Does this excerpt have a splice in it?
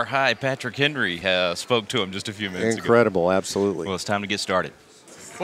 no; 0 cuts

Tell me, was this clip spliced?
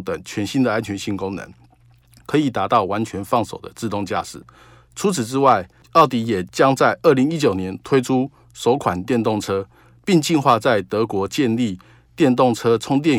no; 0 cuts

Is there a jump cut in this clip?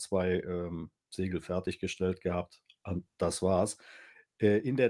no; 0 cuts

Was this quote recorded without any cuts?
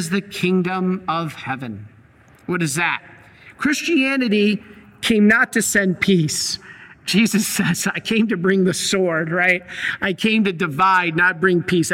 yes; 0 cuts

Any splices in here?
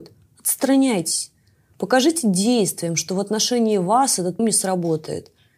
yes; 1 cut; at 4.4 s

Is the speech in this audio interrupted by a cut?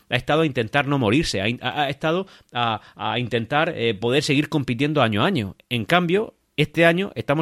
no; 0 cuts

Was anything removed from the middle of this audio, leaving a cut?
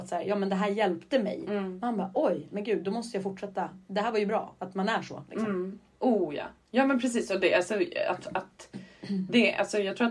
no; 0 cuts

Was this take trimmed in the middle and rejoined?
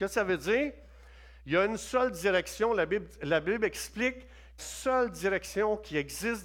yes; 1 cut; at 4.6 s

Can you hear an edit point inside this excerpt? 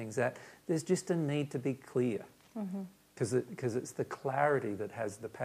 no; 0 cuts

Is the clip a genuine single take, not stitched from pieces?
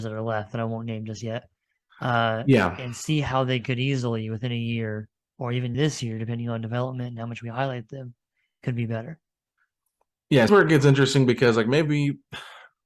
no; 2 cuts; at 5.7 s, 10.5 s

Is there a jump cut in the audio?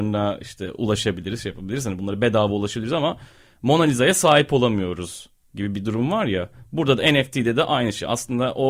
no; 0 cuts

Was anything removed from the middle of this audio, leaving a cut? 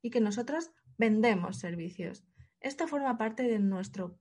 no; 0 cuts

